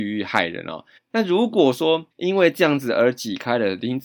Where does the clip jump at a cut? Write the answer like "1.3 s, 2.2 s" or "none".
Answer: 1.0 s, 2.1 s